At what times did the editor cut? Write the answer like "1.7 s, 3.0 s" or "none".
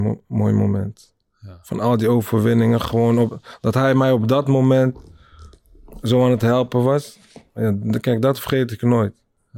none